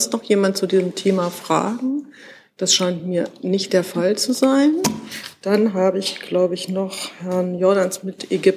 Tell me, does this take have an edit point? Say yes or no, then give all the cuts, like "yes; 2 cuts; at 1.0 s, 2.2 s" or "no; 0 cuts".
no; 0 cuts